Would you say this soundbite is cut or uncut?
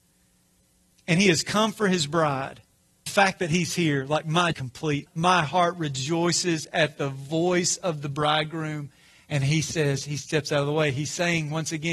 cut